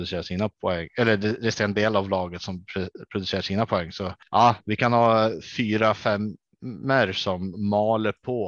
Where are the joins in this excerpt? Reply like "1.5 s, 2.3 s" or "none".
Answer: none